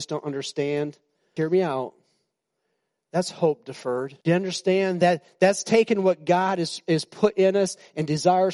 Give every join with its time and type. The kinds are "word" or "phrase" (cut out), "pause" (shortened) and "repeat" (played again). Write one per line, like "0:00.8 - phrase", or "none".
0:01.4 - word
0:04.2 - pause